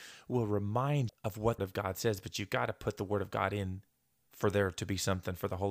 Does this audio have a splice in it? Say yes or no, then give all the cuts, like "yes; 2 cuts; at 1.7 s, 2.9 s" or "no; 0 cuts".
yes; 2 cuts; at 1.1 s, 1.6 s